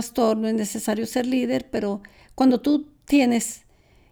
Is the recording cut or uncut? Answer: uncut